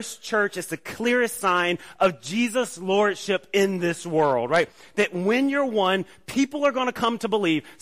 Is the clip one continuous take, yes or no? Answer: yes